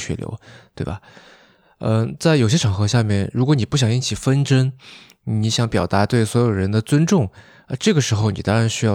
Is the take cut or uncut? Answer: uncut